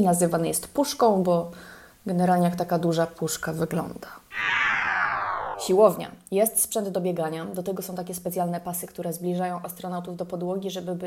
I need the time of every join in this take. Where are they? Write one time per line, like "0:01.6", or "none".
none